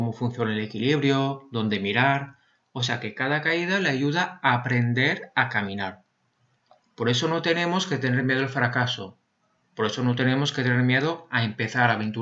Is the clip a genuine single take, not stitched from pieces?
yes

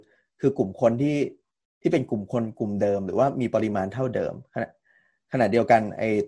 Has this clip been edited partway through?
no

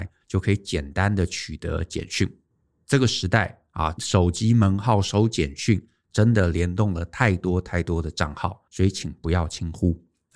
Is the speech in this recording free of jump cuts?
no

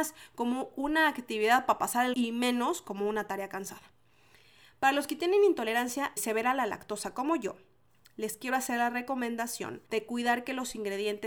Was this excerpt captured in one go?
no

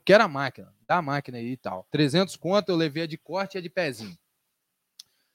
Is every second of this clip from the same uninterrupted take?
no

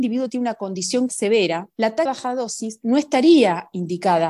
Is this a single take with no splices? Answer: no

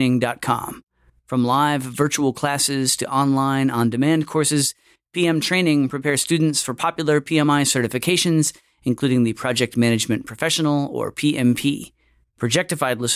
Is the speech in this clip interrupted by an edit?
no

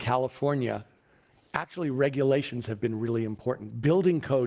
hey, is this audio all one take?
yes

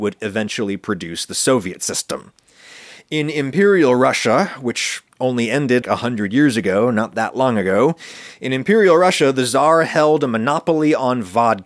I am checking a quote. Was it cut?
yes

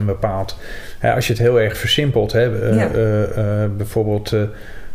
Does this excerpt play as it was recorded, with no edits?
yes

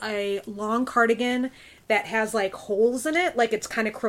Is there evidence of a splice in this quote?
no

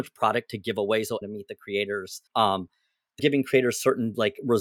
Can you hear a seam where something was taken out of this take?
yes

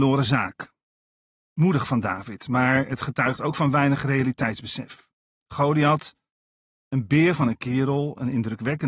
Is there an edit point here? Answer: no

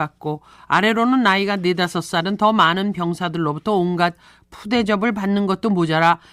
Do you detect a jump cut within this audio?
no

